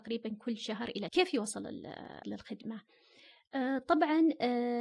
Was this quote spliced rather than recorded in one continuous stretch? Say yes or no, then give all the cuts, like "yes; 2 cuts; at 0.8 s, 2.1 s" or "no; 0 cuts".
yes; 2 cuts; at 1.1 s, 2.2 s